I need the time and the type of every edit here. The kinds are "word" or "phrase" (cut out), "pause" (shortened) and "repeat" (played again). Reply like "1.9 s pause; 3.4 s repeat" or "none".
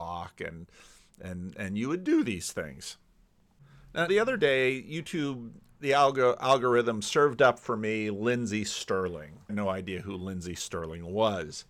4.1 s word; 9.5 s phrase